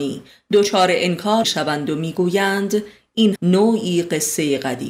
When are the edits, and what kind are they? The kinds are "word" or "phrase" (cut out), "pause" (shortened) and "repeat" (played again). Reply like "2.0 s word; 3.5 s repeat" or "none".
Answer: 1.4 s word; 3.4 s word